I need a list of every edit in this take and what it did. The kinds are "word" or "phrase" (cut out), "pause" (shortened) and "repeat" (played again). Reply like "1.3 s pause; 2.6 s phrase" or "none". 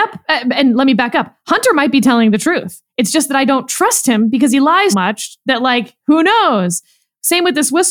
4.9 s word